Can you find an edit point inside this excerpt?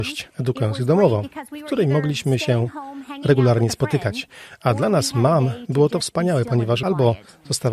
no; 0 cuts

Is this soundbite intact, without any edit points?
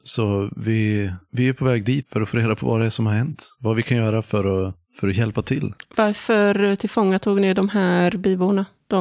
no; 1 cut; at 2.0 s

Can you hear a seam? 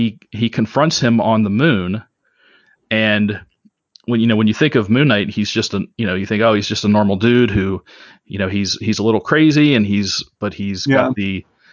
no; 0 cuts

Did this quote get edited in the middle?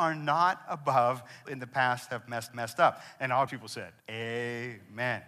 yes; 4 cuts; at 1.5 s, 2.5 s, 3.5 s, 4.0 s

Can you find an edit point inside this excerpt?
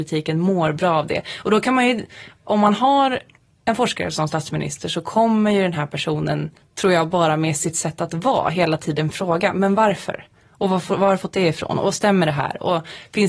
no; 0 cuts

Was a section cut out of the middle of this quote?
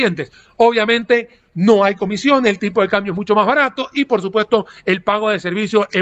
no; 0 cuts

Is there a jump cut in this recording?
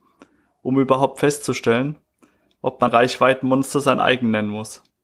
yes; 1 cut; at 2.9 s

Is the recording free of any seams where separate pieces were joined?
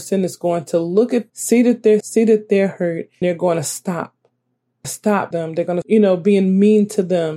no; 6 cuts; at 1.3 s, 2.0 s, 3.2 s, 4.8 s, 5.3 s, 5.8 s

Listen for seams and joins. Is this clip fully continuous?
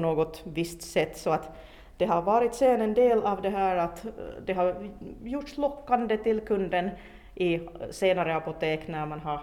yes; 0 cuts

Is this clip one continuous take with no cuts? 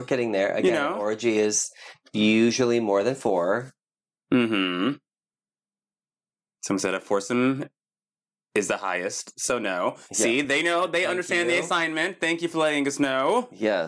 yes; 0 cuts

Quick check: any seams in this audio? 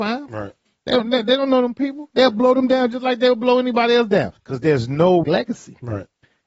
yes; 2 cuts; at 4.4 s, 5.2 s

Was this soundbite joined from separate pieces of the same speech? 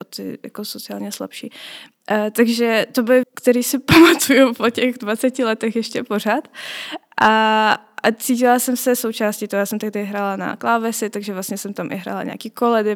yes; 1 cut; at 3.2 s

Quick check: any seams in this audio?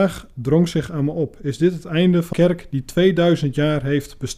yes; 1 cut; at 2.3 s

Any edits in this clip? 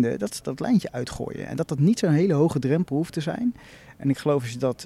no; 0 cuts

